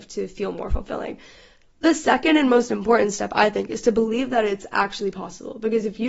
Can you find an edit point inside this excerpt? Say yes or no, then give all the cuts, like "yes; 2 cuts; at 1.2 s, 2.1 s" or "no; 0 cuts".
no; 0 cuts